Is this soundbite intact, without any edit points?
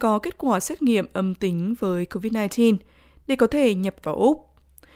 no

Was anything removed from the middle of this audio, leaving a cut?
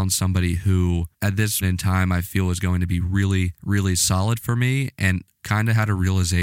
yes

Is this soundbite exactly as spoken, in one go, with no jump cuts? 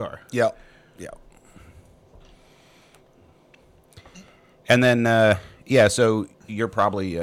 yes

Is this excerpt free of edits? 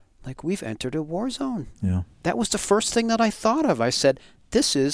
no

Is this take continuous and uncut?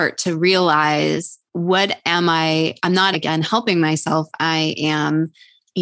no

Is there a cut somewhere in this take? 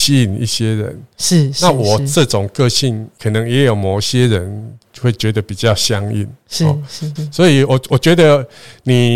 yes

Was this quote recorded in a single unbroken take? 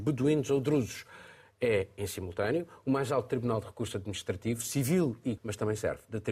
no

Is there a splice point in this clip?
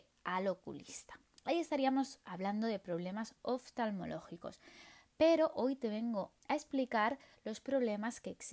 yes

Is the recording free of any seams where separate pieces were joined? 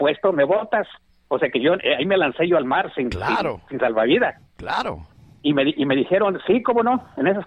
yes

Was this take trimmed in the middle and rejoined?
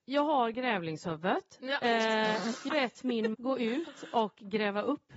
yes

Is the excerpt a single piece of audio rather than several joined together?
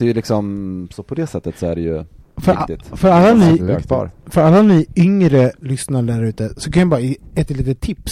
yes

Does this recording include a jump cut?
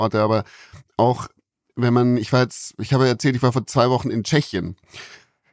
no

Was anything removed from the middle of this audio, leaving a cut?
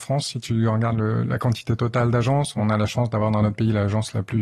no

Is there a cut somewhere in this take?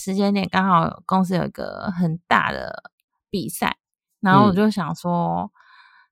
no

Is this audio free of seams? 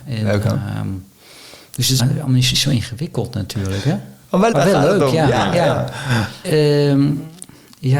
no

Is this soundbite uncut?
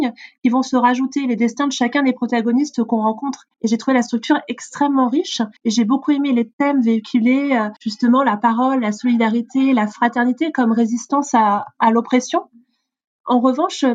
no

